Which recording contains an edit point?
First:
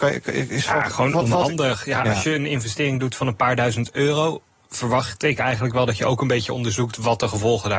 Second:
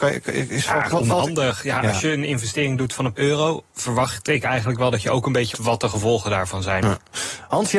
second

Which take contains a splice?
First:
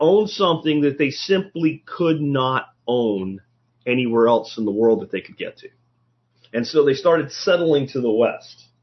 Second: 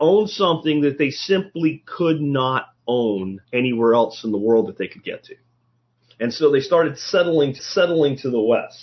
second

